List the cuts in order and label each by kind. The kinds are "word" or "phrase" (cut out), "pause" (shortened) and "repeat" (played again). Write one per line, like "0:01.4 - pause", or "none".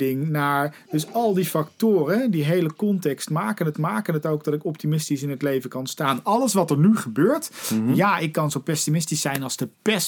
0:03.7 - repeat